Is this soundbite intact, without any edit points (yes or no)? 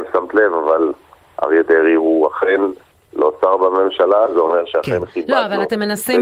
yes